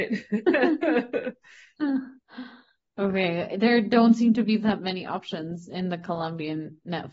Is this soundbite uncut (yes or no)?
yes